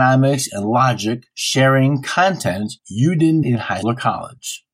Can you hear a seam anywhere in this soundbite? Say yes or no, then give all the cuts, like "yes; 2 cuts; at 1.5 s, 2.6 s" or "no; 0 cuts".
yes; 4 cuts; at 1.3 s, 2.8 s, 3.4 s, 3.8 s